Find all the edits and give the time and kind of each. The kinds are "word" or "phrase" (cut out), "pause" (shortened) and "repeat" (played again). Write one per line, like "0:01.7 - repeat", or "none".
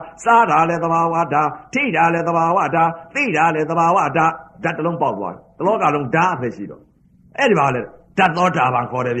none